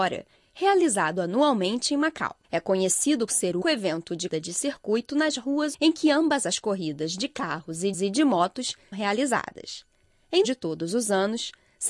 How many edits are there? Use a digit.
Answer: 8